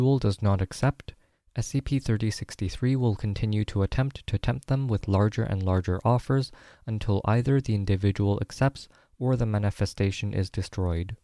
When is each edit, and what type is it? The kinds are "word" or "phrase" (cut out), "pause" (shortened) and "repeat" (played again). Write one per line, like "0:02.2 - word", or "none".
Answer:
none